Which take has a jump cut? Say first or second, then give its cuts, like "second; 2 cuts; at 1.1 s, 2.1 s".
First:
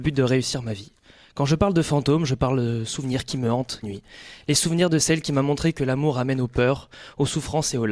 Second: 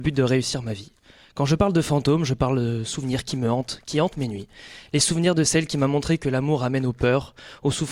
first; 1 cut; at 3.8 s